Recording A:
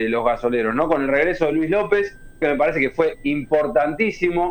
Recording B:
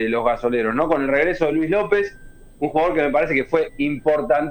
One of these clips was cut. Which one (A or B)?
A